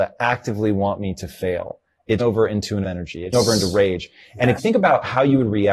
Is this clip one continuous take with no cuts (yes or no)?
no